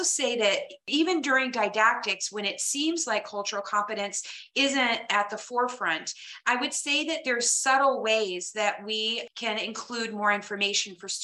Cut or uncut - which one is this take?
uncut